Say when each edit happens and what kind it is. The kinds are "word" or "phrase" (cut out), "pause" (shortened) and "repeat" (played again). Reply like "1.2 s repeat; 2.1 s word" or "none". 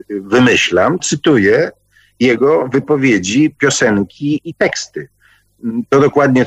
1.0 s word